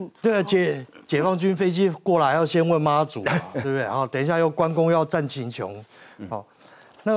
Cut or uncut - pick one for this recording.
uncut